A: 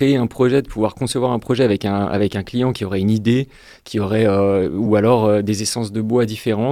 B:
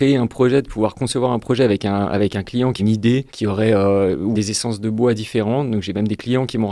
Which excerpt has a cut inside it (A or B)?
B